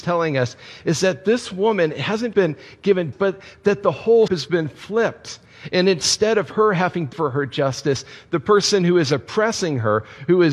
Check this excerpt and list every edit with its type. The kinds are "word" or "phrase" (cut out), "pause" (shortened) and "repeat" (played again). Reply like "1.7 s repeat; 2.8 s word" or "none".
2.3 s word; 3.1 s word; 4.3 s word; 7.1 s word